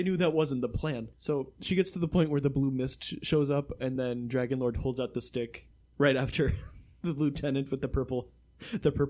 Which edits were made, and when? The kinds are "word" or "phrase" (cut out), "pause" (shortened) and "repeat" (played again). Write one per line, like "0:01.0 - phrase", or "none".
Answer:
none